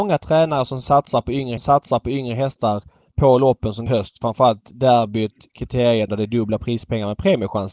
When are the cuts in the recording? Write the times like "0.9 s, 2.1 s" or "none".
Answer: 1.6 s, 3.9 s, 6.1 s